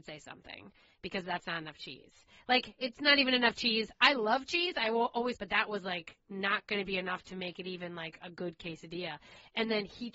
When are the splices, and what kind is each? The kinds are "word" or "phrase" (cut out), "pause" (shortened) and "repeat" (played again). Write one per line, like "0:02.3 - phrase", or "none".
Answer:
0:05.4 - phrase